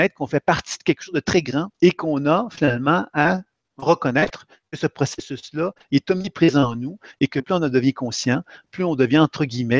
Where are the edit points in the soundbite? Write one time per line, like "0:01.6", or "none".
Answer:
0:01.7